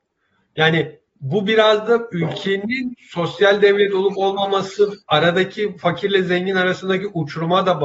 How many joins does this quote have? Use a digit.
1